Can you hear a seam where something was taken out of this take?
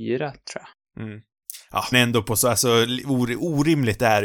yes; 1 cut; at 1.9 s

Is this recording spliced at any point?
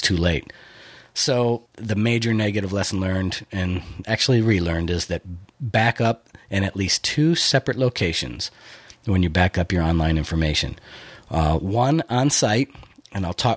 yes; 2 cuts; at 1.7 s, 5.5 s

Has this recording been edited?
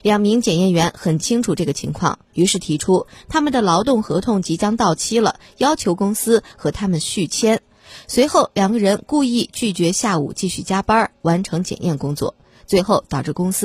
no; 0 cuts

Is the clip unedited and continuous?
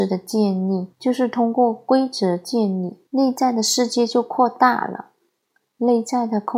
no; 2 cuts; at 0.9 s, 3.1 s

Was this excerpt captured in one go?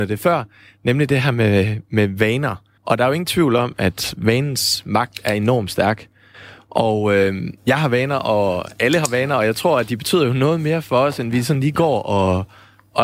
no; 2 cuts; at 2.8 s, 7.6 s

